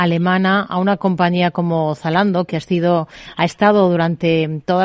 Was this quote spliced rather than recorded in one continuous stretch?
no; 0 cuts

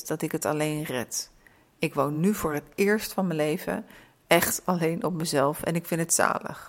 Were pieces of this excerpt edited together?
no; 0 cuts

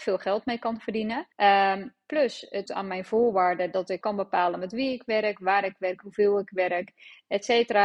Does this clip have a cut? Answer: yes; 3 cuts; at 1.3 s, 2.7 s, 4.0 s

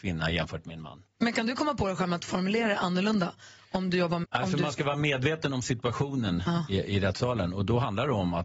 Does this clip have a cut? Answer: yes; 1 cut; at 4.2 s

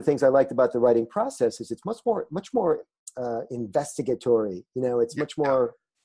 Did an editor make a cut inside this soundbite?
no; 0 cuts

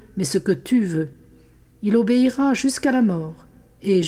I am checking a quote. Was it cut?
no; 0 cuts

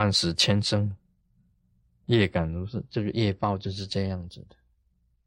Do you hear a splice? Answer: no; 0 cuts

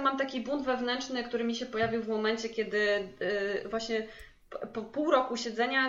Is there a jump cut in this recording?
no; 0 cuts

